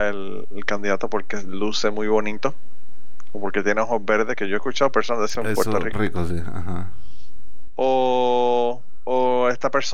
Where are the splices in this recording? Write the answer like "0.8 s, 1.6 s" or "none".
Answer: 5.3 s, 5.9 s